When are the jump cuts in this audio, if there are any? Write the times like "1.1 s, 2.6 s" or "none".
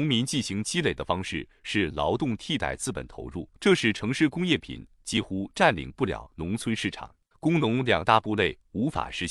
3.6 s, 7.3 s